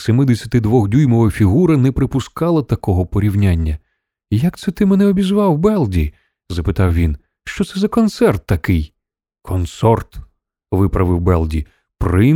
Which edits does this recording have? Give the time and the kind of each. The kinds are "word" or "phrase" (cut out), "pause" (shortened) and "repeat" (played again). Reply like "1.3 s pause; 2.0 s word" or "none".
none